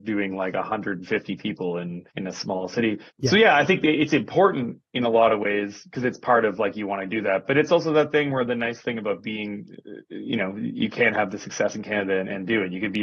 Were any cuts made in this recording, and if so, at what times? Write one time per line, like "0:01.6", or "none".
0:02.1
0:03.1

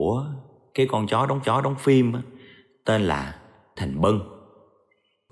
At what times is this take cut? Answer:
0:01.4
0:03.8

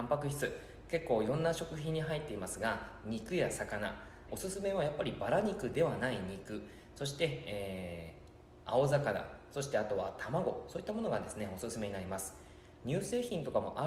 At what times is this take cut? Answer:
0:04.3

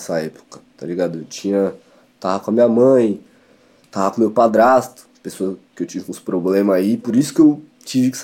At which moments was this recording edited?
none

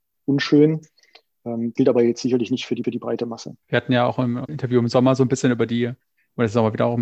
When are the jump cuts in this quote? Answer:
0:01.8
0:02.8
0:03.6
0:04.5

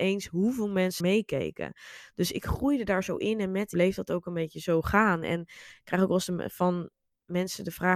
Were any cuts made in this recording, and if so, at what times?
0:01.0
0:03.7

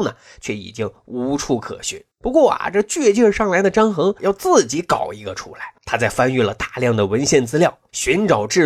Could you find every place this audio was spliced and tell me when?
0:02.1
0:04.2
0:05.8

